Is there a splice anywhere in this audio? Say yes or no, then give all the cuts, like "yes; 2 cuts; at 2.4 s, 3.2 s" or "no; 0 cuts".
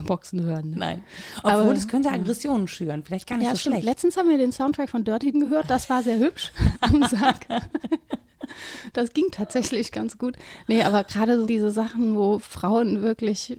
yes; 2 cuts; at 5.3 s, 11.4 s